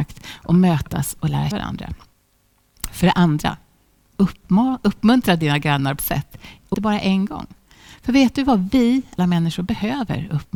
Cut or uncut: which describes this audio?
cut